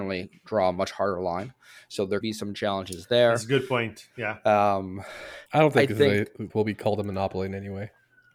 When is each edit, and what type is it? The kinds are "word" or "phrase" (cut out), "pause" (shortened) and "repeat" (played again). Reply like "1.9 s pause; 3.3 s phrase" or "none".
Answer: 2.2 s word; 5.5 s pause; 6.5 s word